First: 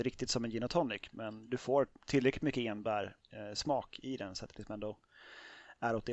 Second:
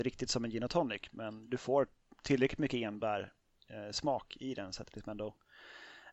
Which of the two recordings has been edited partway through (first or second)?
first